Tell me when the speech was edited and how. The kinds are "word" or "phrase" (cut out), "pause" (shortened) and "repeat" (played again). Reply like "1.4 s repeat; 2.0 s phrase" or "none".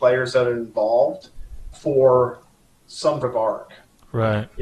1.7 s word; 3.2 s word